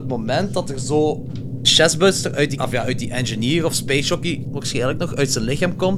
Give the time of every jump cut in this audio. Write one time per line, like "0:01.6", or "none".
0:01.6
0:02.6
0:04.4